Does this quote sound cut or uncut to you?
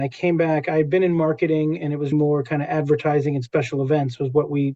cut